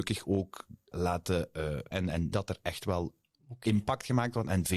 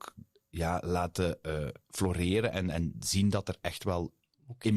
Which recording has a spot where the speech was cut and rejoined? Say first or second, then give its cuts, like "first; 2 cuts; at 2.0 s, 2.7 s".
first; 3 cuts; at 0.9 s, 1.9 s, 2.3 s